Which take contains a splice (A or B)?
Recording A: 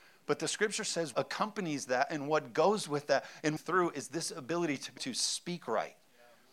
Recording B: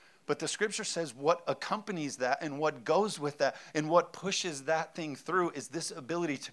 A